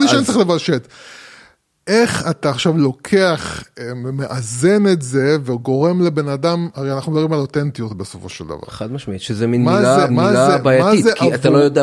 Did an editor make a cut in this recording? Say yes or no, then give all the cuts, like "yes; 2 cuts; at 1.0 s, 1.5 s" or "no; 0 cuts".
yes; 2 cuts; at 6.7 s, 10.1 s